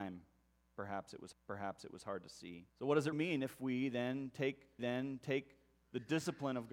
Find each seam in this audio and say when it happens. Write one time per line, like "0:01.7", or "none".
0:01.3
0:02.7
0:03.1
0:04.8